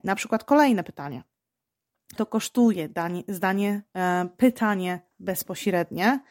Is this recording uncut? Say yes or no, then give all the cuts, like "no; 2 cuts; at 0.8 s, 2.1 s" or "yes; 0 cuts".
no; 1 cut; at 2.2 s